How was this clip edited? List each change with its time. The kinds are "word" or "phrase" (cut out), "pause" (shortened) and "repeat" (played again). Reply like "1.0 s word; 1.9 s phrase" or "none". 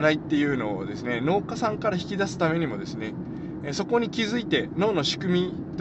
none